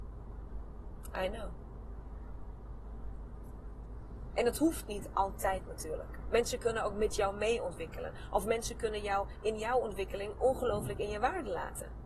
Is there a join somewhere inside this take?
no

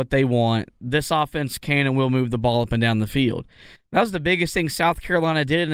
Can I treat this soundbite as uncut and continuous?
yes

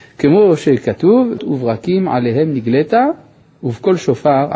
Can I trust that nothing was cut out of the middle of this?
no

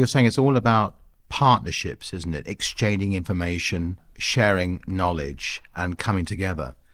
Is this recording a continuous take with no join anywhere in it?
yes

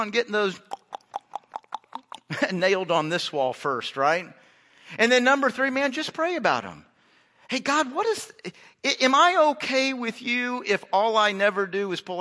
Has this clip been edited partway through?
no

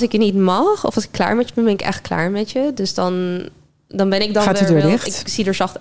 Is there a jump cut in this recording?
no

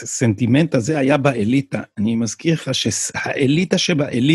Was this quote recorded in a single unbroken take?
yes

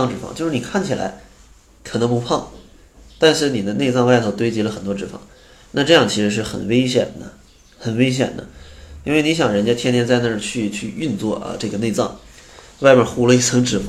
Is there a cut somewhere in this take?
no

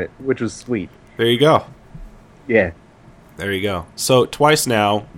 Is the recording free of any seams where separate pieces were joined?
yes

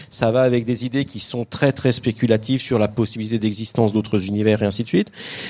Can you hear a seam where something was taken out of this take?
no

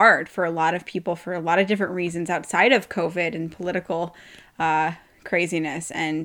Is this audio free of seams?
yes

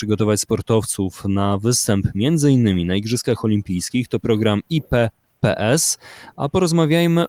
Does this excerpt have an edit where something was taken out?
no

